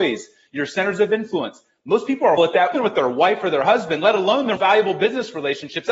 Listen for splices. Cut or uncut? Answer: cut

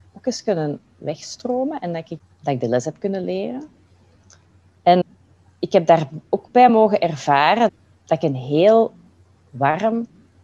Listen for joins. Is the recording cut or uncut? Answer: uncut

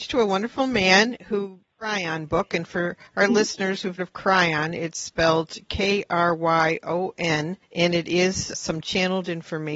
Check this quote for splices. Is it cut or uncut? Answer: cut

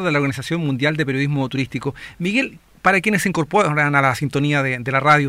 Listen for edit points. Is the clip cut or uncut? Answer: uncut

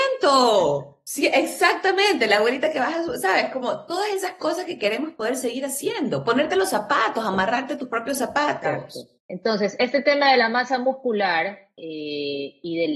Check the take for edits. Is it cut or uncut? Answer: cut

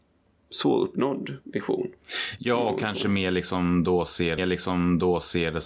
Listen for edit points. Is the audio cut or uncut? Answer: cut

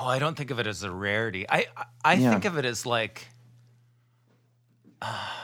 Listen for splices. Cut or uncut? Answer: uncut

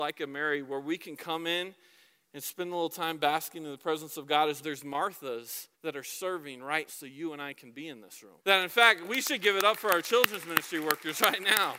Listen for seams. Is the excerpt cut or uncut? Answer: cut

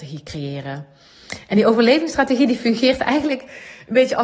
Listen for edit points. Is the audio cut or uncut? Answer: uncut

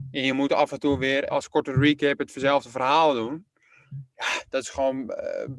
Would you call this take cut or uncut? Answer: cut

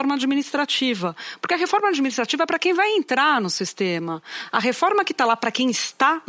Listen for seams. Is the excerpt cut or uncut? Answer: uncut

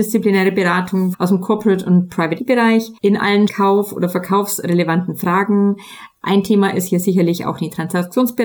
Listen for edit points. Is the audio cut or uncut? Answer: cut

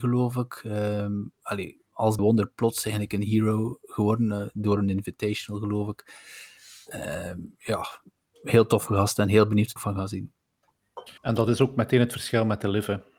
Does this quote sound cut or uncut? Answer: cut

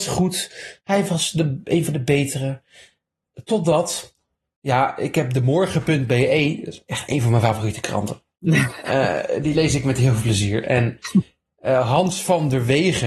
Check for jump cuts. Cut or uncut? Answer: uncut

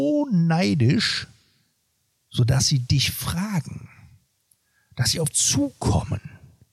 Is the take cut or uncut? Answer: cut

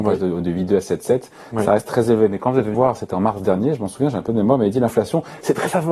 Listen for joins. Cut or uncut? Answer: cut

